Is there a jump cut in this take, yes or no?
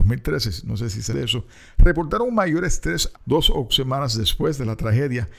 yes